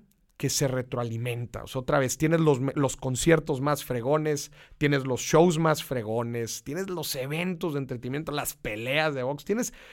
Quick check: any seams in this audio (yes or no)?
no